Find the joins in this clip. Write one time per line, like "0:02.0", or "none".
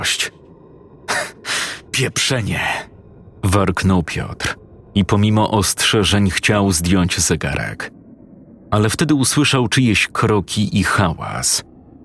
0:01.9